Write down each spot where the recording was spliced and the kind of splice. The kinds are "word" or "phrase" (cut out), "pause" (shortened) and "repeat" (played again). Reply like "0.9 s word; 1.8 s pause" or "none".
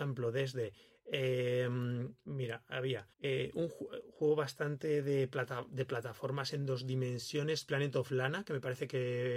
3.1 s pause